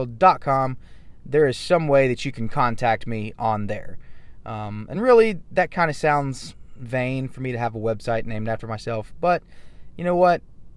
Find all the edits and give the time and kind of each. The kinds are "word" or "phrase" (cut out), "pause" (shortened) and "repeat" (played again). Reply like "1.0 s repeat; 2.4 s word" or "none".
none